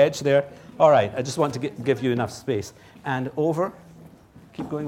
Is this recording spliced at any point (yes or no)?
no